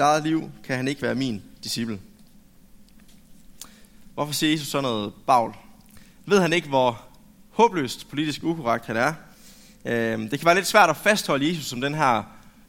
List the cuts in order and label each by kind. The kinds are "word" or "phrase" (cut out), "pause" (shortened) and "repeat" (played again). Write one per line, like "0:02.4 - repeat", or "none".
none

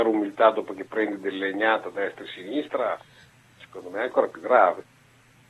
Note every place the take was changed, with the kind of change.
none

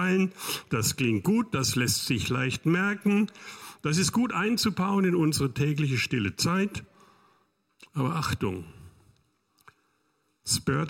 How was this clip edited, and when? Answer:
none

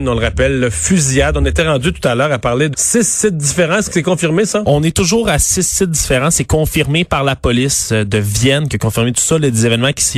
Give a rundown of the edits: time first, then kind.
0:02.7 - word

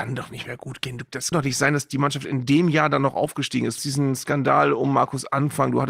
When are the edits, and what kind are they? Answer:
0:01.3 - word
0:03.8 - word

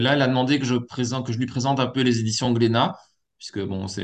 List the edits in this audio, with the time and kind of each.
none

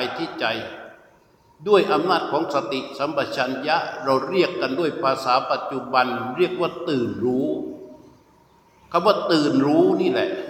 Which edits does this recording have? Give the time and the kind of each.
none

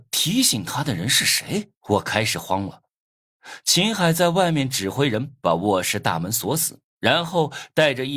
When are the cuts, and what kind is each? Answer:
0:01.8 - pause
0:06.9 - pause

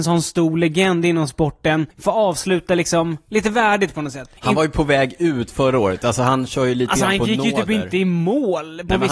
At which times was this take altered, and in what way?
0:01.9 - pause
0:04.4 - pause

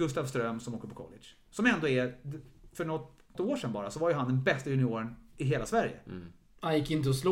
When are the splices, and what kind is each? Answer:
0:03.3 - word

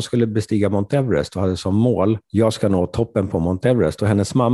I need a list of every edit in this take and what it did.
0:02.2 - pause

